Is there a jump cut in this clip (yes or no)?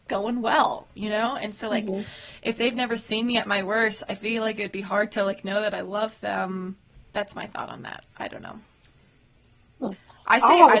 no